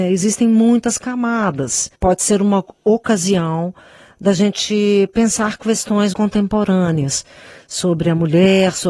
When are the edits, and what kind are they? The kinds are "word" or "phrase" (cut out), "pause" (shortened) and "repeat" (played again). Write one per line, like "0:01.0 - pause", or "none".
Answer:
0:01.9 - pause
0:06.1 - word